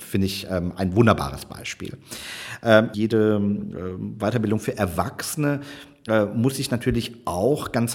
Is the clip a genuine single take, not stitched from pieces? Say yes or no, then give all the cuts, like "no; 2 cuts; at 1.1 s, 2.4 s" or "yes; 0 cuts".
no; 1 cut; at 2.9 s